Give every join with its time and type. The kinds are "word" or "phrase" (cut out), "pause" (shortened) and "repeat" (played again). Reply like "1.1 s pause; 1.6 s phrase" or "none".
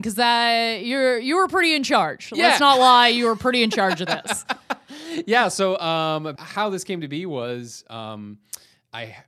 6.4 s word